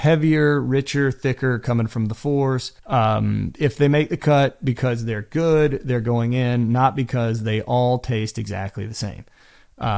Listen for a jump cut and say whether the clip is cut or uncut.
cut